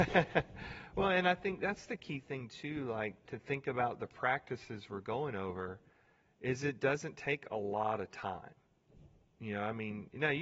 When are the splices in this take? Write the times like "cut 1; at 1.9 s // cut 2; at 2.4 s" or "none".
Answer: none